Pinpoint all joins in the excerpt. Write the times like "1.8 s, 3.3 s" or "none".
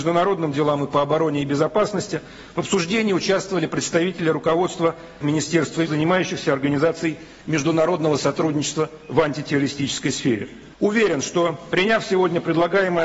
5.2 s, 5.9 s, 10.7 s